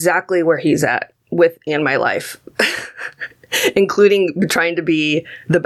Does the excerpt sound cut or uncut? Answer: cut